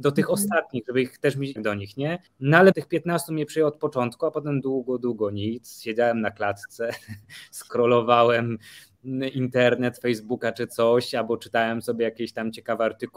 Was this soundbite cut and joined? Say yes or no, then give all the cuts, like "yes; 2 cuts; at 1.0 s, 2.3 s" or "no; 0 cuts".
yes; 4 cuts; at 1.6 s, 2.3 s, 2.7 s, 4.6 s